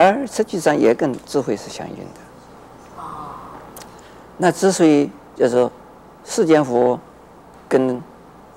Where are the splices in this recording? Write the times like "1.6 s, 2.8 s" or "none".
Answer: 5.3 s